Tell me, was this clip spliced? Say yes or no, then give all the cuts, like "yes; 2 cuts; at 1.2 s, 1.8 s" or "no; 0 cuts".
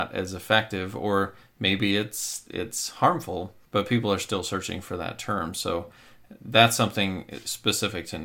yes; 1 cut; at 3.6 s